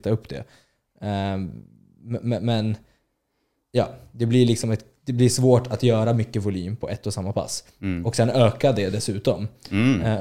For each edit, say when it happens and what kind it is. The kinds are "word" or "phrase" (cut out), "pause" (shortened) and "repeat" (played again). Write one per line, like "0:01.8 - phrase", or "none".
none